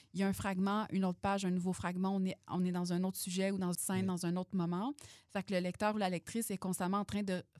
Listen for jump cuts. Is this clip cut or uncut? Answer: cut